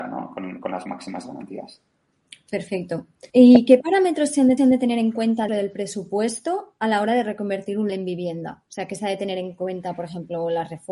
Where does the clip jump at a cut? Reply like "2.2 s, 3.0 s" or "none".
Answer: 3.3 s, 4.6 s, 5.5 s, 7.9 s, 8.7 s